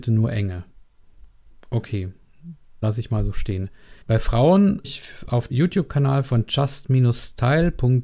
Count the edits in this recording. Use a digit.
4